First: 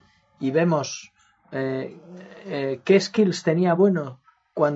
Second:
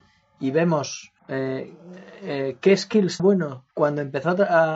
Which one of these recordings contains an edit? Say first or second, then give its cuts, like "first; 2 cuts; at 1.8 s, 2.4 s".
second; 3 cuts; at 1.2 s, 3.2 s, 3.7 s